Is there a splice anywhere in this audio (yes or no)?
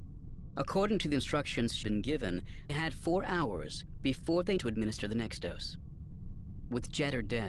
yes